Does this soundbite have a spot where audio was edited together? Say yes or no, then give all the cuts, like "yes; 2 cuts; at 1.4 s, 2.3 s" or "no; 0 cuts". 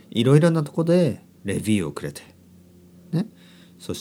no; 0 cuts